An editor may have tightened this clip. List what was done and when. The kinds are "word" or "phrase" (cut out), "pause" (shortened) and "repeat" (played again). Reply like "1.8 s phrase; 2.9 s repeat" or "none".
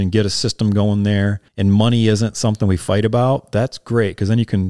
1.5 s pause